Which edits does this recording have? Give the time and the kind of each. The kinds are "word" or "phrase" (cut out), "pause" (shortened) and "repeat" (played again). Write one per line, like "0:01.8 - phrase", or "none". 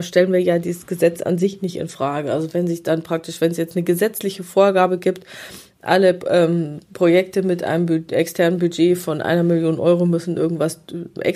0:06.9 - pause